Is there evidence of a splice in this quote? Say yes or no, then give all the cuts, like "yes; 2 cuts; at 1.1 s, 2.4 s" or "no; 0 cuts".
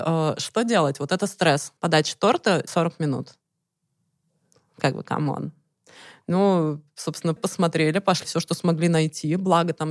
yes; 4 cuts; at 1.8 s, 2.7 s, 7.4 s, 8.2 s